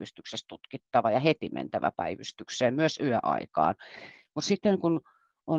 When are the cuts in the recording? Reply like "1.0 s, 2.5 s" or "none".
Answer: none

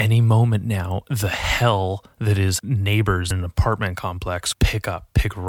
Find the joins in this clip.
2.1 s, 2.6 s, 3.3 s, 4.5 s

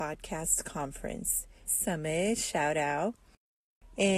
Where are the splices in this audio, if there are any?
1.7 s

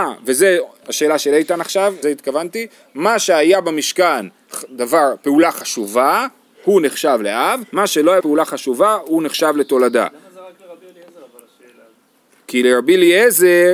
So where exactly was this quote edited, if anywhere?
2.0 s, 7.7 s, 8.2 s

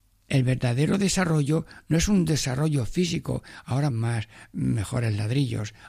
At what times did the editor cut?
3.9 s

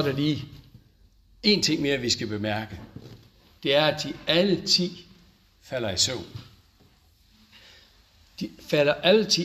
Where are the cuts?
none

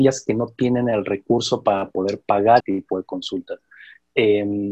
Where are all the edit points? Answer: 2.6 s

